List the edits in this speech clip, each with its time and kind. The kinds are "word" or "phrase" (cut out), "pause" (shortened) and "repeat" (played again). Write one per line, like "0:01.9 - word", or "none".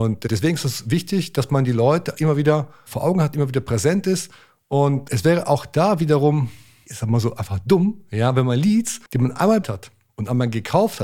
0:09.1 - pause
0:09.6 - word